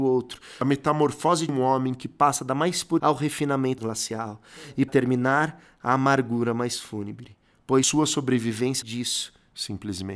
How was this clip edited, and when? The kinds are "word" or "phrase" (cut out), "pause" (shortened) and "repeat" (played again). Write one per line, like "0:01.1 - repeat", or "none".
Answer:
0:03.0 - word
0:03.8 - word
0:04.9 - word
0:08.8 - word